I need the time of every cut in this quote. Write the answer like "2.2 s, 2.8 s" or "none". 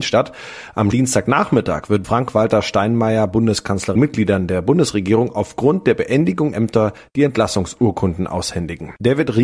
0.9 s, 2.0 s, 4.0 s, 6.5 s